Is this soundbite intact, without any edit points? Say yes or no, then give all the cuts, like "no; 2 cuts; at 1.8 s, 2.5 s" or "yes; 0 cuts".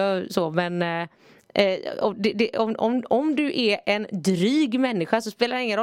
yes; 0 cuts